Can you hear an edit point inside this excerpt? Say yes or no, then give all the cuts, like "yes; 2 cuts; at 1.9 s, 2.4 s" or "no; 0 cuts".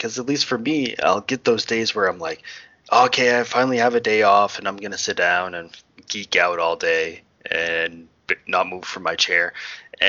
no; 0 cuts